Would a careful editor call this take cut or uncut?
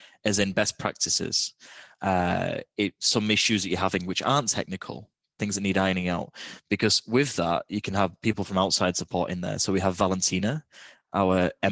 uncut